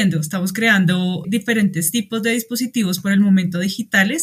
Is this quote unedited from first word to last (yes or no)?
no